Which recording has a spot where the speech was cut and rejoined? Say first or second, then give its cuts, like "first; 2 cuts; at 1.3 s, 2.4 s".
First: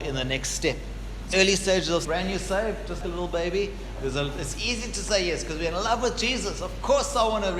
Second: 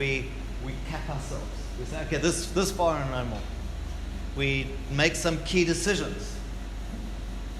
first; 3 cuts; at 1.3 s, 2.0 s, 3.0 s